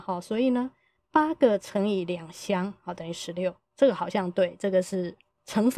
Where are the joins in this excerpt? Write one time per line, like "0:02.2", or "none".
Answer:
0:03.6